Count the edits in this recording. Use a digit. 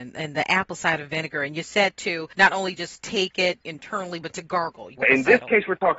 0